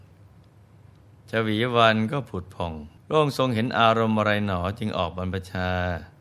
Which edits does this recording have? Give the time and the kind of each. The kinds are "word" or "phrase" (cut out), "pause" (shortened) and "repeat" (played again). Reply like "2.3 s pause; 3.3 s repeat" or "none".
3.0 s pause